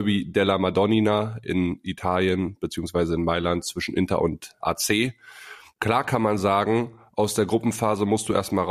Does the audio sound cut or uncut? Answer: uncut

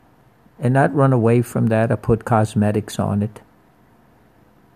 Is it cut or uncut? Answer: uncut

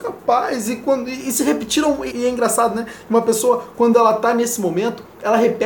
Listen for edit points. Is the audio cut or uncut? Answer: cut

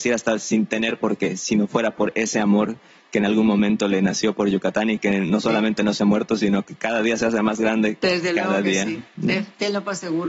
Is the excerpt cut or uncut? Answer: uncut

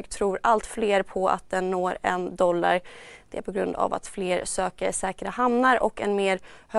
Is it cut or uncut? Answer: uncut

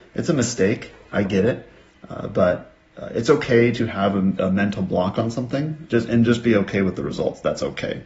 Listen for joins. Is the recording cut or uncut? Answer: uncut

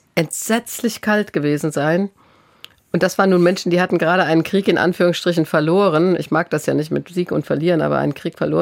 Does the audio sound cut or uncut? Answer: uncut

